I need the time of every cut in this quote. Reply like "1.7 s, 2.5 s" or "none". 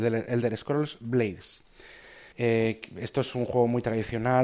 2.3 s

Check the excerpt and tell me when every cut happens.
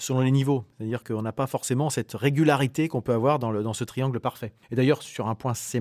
4.6 s

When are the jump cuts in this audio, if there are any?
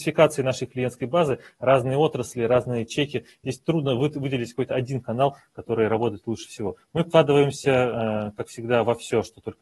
none

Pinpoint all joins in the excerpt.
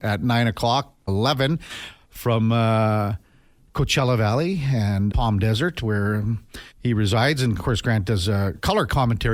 1.1 s, 5.1 s, 6.7 s

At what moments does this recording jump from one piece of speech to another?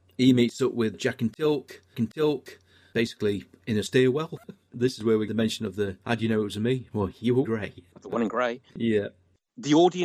1.9 s, 4.7 s, 5.3 s, 6.0 s, 7.4 s, 8.7 s

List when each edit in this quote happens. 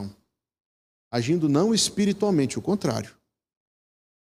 none

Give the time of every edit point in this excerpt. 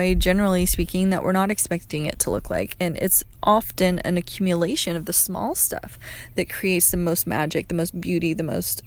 none

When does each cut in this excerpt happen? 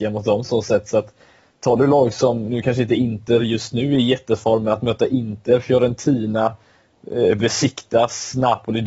none

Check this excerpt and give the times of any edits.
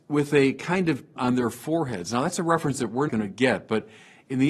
1.2 s, 3.1 s

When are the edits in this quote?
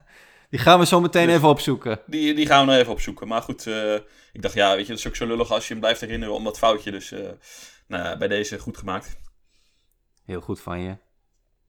none

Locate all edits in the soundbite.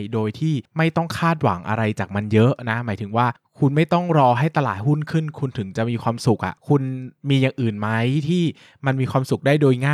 7.2 s

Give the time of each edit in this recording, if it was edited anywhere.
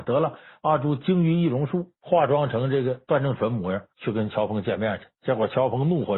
1.9 s, 3.9 s, 5.1 s

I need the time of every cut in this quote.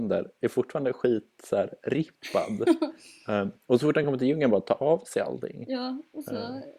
none

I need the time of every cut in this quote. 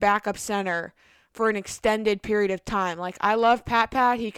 none

